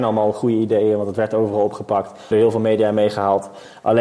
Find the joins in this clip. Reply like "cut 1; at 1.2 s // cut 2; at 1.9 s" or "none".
cut 1; at 2.3 s